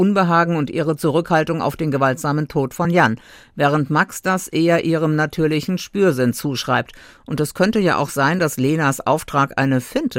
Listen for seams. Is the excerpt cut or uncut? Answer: uncut